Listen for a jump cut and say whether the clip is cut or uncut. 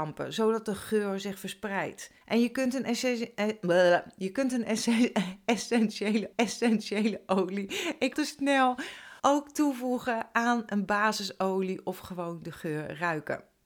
cut